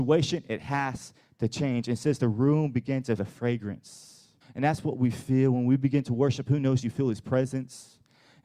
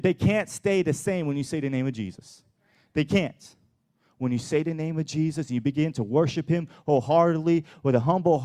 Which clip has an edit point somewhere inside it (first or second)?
first